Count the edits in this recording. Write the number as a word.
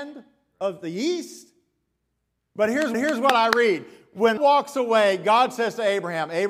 two